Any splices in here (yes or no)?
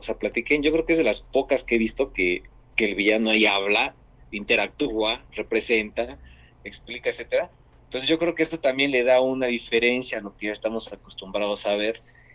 no